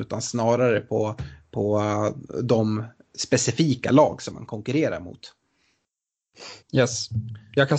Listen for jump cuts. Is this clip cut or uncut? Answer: cut